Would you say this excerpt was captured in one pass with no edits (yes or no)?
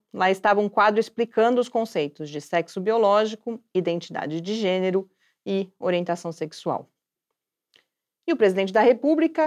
yes